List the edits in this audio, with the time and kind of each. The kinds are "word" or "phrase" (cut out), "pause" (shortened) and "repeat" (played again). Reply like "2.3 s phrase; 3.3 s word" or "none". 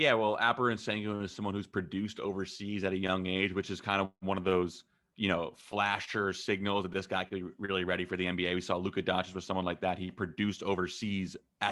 none